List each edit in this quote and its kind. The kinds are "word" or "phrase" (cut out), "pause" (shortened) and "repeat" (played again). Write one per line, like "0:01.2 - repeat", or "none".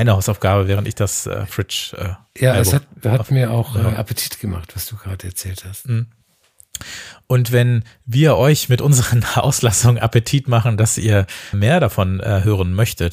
0:11.5 - word